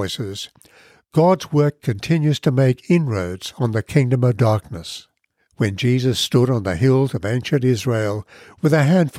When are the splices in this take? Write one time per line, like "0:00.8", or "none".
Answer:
0:05.4